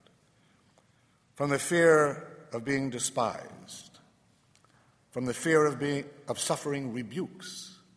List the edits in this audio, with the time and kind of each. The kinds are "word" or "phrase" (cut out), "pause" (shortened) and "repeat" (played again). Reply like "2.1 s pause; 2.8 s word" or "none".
none